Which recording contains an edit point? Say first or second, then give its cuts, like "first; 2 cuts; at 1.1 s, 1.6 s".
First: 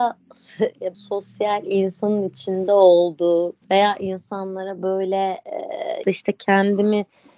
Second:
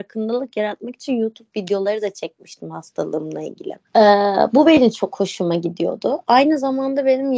first; 3 cuts; at 0.9 s, 3.6 s, 6.0 s